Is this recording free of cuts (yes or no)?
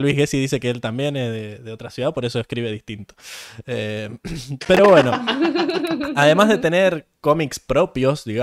yes